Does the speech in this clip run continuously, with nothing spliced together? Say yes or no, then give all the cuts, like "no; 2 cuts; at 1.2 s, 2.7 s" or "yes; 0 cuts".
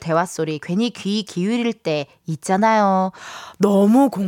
yes; 0 cuts